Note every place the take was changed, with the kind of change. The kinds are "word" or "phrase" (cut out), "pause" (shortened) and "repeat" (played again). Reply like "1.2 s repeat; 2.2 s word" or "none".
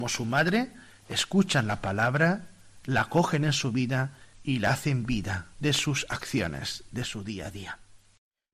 4.3 s pause; 5.5 s phrase